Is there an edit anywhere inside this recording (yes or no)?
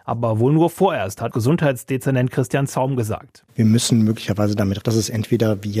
yes